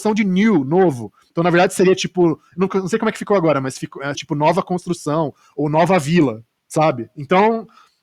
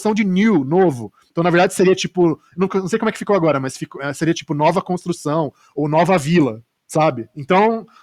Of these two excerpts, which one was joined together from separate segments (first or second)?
first